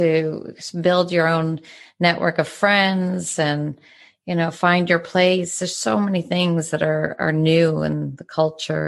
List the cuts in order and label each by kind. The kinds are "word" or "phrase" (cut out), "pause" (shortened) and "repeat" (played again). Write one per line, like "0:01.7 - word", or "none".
none